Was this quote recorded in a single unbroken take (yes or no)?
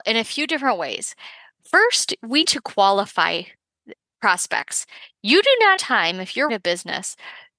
no